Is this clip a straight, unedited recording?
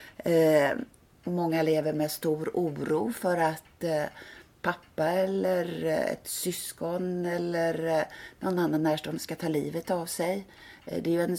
yes; 0 cuts

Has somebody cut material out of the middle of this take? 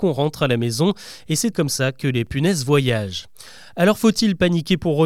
yes; 1 cut; at 1.5 s

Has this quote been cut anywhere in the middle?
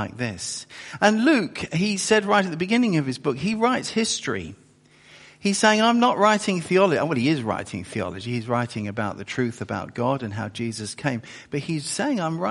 no; 0 cuts

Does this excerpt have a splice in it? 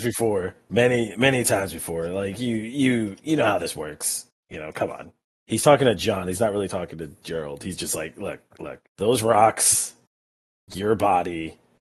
yes; 3 cuts; at 4.4 s, 5.2 s, 8.9 s

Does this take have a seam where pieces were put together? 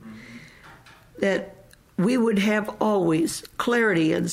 no; 0 cuts

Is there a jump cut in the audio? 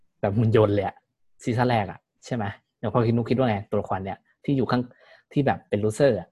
no; 0 cuts

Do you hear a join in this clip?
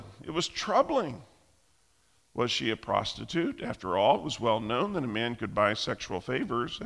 no; 0 cuts

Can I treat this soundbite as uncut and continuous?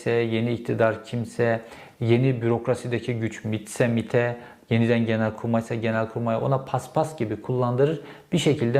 yes; 0 cuts

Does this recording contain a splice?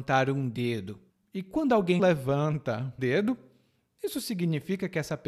yes; 3 cuts; at 1.1 s, 2.0 s, 3.0 s

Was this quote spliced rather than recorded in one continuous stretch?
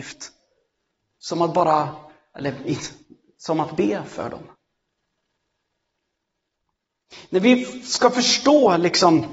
no; 0 cuts

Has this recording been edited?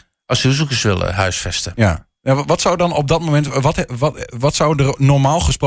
no; 0 cuts

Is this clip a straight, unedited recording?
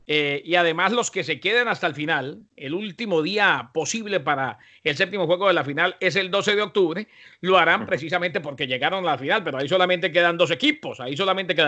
yes; 0 cuts

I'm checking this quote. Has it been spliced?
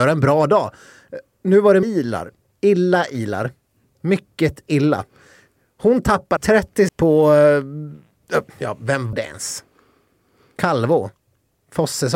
yes; 5 cuts; at 1.8 s, 4.7 s, 6.4 s, 6.9 s, 9.1 s

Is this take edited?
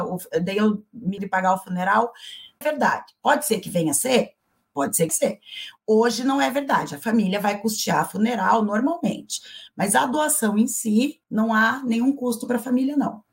yes; 4 cuts; at 1.2 s, 2.6 s, 5.1 s, 11.2 s

